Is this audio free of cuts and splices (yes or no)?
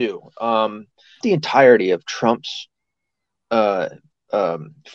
no